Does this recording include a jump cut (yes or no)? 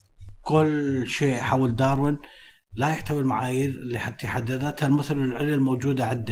no